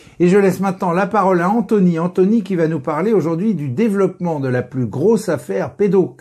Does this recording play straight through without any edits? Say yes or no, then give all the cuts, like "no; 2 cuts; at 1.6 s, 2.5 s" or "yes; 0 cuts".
yes; 0 cuts